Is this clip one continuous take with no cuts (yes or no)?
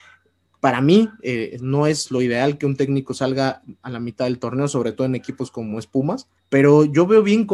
no